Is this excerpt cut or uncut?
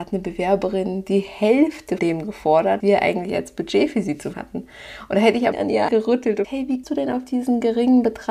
cut